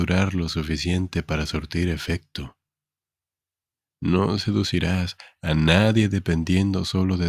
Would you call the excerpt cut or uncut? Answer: uncut